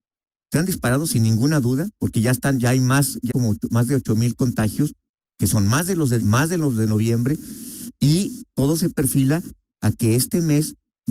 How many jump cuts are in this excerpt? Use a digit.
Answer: 2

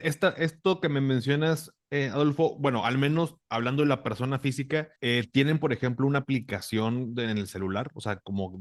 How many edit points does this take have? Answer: 2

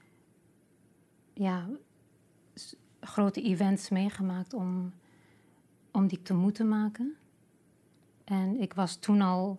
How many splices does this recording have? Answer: 1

